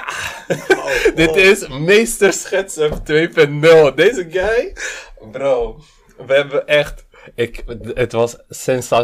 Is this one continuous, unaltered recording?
yes; 0 cuts

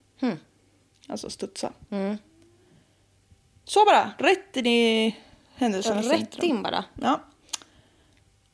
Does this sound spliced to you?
no; 0 cuts

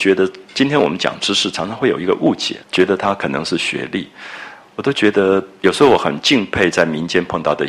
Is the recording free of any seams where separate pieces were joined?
no; 1 cut; at 2.6 s

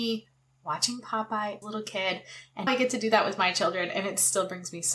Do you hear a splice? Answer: yes; 2 cuts; at 1.6 s, 2.7 s

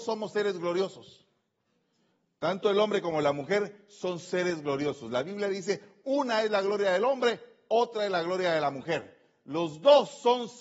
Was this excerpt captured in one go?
yes; 0 cuts

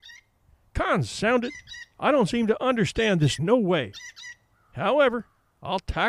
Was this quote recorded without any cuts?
no; 1 cut; at 3.4 s

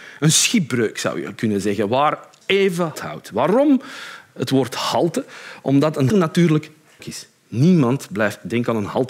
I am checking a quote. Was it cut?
yes; 4 cuts; at 2.4 s, 2.9 s, 6.1 s, 7.0 s

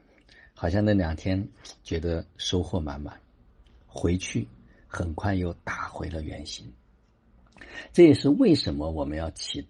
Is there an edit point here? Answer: no; 0 cuts

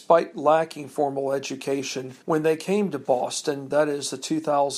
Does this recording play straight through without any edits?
no; 1 cut; at 2.2 s

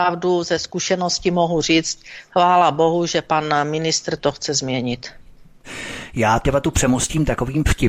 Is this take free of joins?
no; 1 cut; at 6.4 s

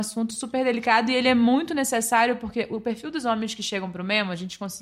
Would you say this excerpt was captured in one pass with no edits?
yes; 0 cuts

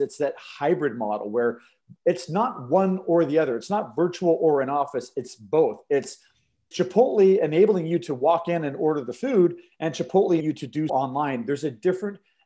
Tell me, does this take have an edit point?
yes; 3 cuts; at 6.7 s, 10.4 s, 10.9 s

